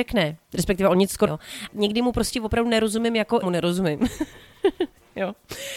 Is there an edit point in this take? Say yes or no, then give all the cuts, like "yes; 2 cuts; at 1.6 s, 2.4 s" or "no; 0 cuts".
yes; 3 cuts; at 1.3 s, 1.7 s, 3.4 s